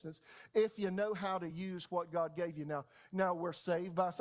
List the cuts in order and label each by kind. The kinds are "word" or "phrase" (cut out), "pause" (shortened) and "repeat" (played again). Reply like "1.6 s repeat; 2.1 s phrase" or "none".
none